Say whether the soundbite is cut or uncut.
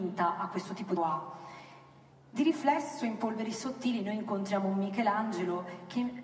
cut